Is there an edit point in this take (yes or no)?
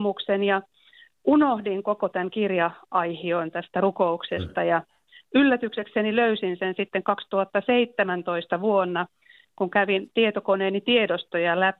no